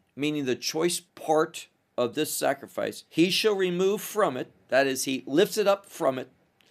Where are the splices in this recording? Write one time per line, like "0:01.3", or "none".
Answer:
0:01.1
0:03.1